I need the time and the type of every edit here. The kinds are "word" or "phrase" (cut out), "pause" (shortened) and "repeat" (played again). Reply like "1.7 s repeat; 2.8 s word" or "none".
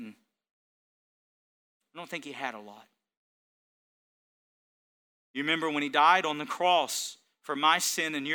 none